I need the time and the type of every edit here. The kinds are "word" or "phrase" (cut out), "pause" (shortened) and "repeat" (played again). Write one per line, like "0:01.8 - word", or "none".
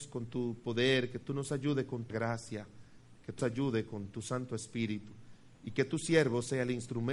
0:02.1 - word
0:03.4 - word
0:05.5 - pause